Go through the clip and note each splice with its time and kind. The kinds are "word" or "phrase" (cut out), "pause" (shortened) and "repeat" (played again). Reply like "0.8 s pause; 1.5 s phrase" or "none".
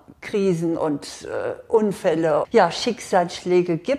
2.4 s word